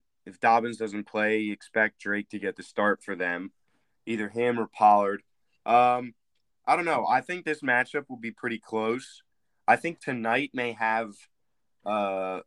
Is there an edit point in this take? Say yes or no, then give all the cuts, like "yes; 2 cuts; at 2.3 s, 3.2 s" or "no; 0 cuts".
no; 0 cuts